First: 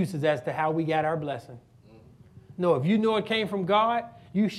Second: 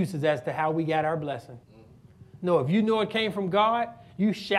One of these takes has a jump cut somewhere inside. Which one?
second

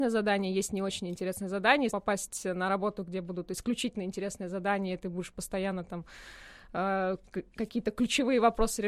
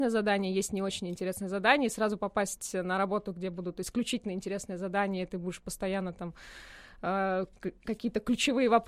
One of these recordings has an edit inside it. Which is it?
first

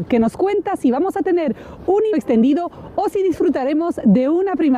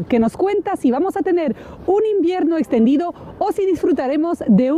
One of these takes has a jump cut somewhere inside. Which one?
first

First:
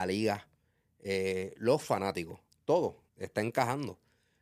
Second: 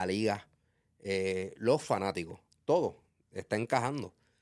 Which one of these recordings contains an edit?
first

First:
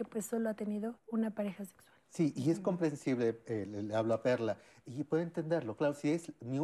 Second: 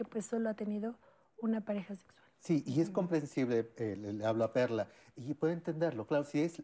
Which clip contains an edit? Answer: first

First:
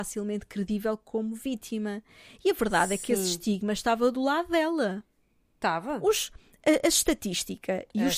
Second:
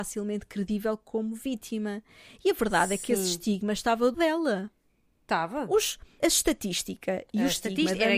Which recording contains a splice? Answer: second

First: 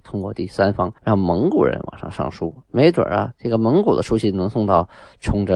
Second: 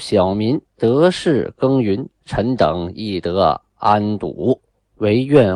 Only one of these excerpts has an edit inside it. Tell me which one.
first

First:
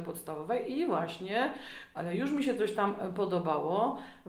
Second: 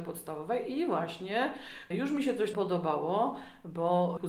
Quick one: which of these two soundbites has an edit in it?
second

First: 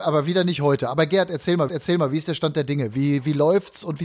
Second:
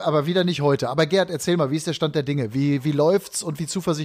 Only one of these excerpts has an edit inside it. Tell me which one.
first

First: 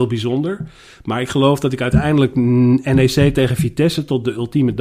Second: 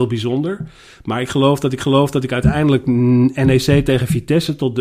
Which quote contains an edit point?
second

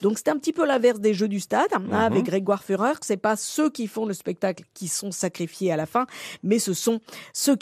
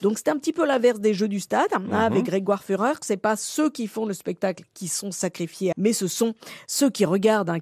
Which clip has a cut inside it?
second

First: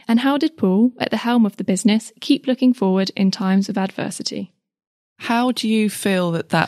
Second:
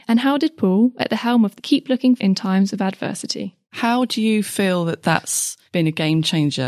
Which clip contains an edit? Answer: second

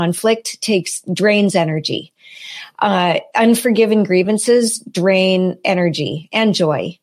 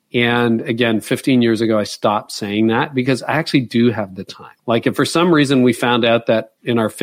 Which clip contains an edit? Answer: second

